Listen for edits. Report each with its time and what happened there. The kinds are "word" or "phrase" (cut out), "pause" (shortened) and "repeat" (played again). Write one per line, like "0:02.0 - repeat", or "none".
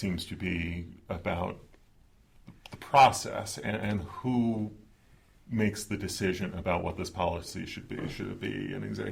none